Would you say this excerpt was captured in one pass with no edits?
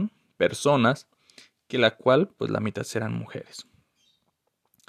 yes; 0 cuts

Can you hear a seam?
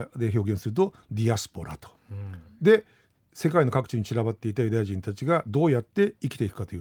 no; 0 cuts

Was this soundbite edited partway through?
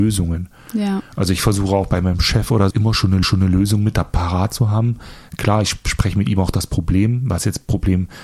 yes; 2 cuts; at 2.7 s, 3.2 s

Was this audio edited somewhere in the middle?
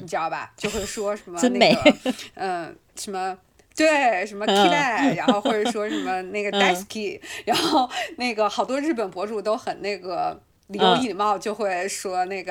no; 0 cuts

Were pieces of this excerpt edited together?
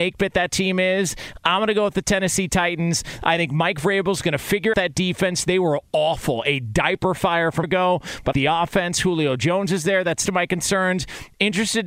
yes; 4 cuts; at 4.7 s, 7.6 s, 8.3 s, 10.3 s

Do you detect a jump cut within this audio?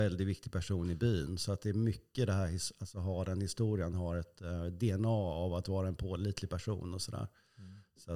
no; 0 cuts

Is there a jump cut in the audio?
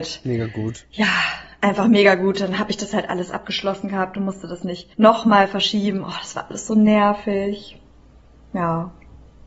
yes; 2 cuts; at 4.9 s, 8.0 s

